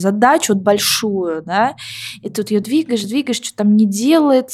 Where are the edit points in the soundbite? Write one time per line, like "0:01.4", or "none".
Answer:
none